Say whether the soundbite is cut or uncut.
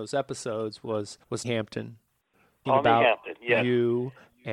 cut